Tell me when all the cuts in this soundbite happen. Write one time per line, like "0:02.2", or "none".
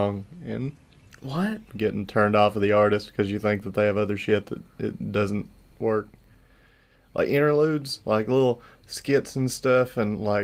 none